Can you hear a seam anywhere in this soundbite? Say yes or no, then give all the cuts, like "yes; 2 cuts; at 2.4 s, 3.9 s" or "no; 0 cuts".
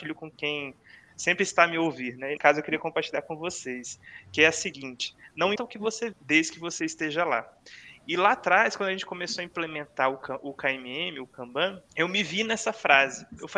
yes; 4 cuts; at 2.4 s, 5.6 s, 6.1 s, 11.9 s